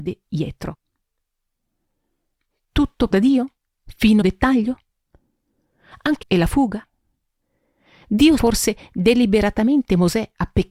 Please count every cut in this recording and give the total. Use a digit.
4